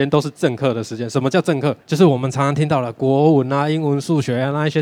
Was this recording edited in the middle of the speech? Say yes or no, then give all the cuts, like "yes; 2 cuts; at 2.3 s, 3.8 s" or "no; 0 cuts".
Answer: yes; 1 cut; at 1.8 s